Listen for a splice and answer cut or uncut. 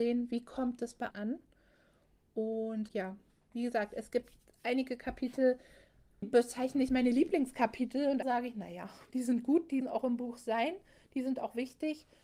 cut